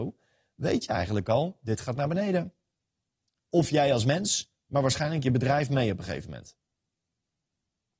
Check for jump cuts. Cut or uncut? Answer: uncut